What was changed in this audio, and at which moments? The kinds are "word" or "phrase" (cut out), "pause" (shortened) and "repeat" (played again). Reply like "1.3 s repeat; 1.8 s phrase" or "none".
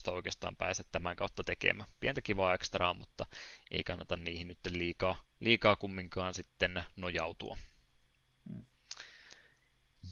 5.3 s pause